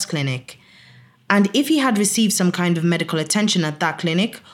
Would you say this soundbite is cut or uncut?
uncut